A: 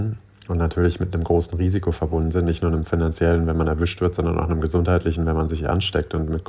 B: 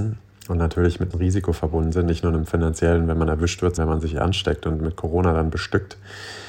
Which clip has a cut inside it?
B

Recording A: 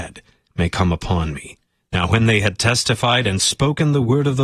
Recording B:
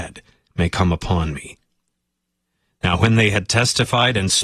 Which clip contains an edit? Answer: A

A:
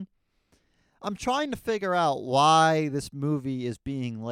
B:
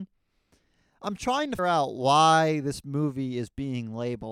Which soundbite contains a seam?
B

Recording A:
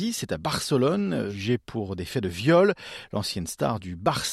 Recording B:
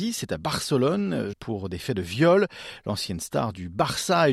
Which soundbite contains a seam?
B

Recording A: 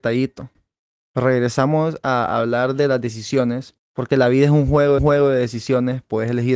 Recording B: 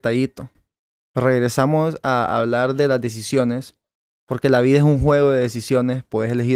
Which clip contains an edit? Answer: A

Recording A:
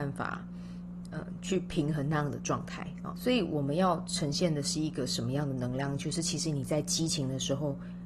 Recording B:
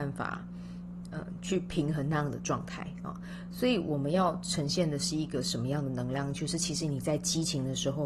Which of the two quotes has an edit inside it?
A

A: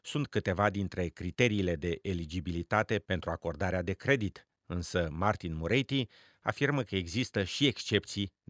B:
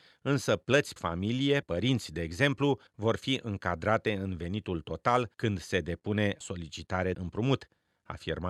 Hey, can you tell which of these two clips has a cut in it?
B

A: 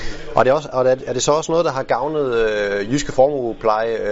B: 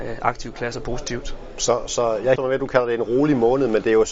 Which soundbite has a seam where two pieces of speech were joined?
B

